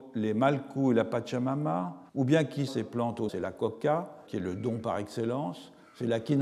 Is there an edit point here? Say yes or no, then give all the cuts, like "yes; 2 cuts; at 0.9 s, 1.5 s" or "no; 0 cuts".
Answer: yes; 4 cuts; at 2.1 s, 2.7 s, 3.3 s, 4.3 s